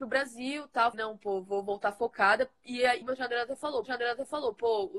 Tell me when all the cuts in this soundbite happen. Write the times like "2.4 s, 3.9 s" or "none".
0.9 s, 3.0 s, 3.8 s

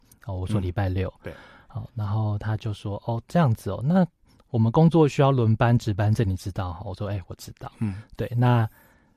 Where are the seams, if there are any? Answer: none

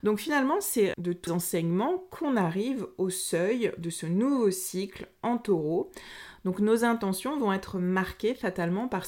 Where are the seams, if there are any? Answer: 0.9 s, 1.3 s

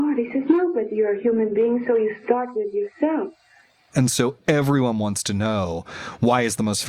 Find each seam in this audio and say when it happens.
none

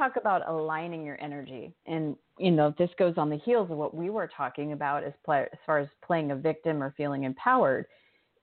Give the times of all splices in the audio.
1.8 s

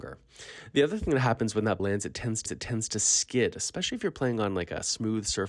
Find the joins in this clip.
1.8 s, 2.5 s

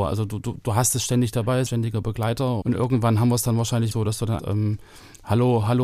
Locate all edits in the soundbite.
1.7 s, 2.6 s, 3.9 s, 4.4 s

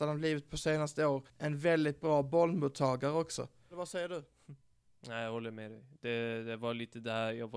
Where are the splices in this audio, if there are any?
1.3 s

